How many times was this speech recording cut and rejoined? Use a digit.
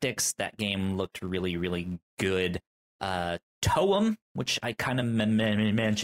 0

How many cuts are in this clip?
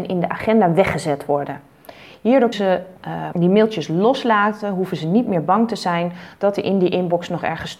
2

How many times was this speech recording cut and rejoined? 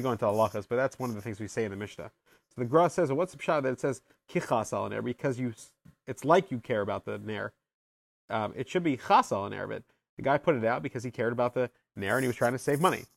0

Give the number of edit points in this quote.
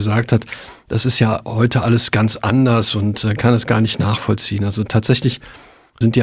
0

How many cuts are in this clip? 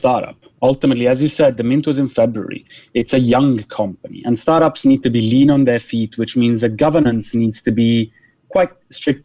0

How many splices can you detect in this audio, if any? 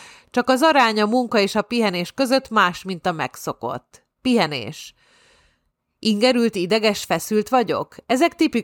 1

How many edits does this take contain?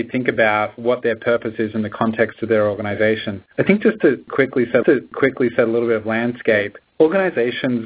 2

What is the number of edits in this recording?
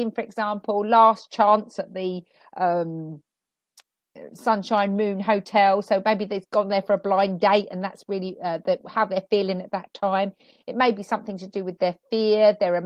0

